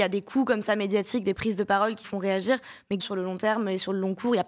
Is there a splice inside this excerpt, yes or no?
yes